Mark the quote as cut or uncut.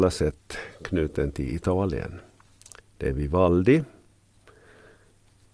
uncut